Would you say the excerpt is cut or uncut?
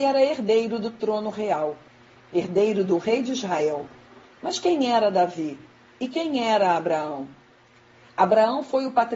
uncut